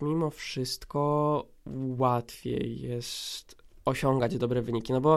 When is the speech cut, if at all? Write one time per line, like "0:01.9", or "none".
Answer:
none